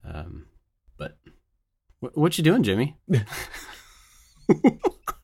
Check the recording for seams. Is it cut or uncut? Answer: uncut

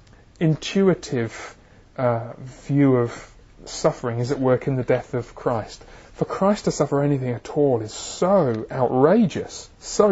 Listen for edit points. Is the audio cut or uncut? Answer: cut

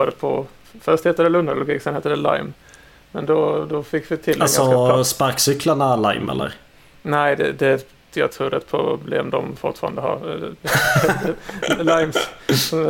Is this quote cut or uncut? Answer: uncut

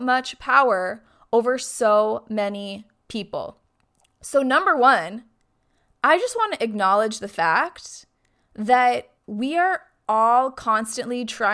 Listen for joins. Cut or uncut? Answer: cut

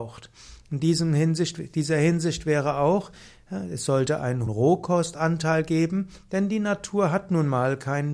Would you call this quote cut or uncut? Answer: cut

